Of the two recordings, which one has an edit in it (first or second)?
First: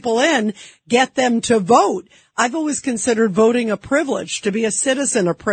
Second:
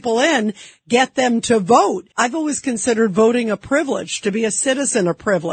second